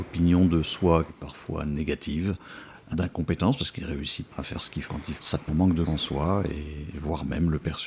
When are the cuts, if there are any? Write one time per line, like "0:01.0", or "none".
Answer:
0:01.1
0:02.9
0:04.3
0:04.8
0:05.2
0:05.5
0:05.9